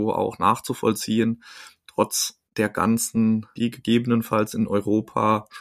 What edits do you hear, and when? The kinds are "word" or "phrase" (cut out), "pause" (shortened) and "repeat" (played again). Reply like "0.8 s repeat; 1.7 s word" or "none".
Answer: 1.8 s word; 2.5 s pause; 3.6 s word